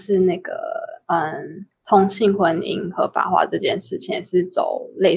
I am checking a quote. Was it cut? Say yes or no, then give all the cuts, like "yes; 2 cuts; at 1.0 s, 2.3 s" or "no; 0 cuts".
yes; 1 cut; at 1.8 s